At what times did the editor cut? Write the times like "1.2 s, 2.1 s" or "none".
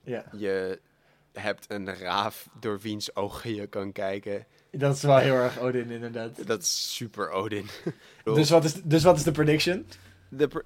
8.3 s